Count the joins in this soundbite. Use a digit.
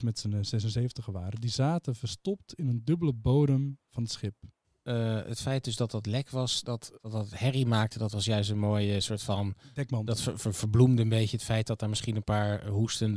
1